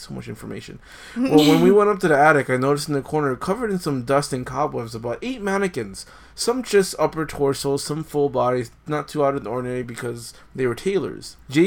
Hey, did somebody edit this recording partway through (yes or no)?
no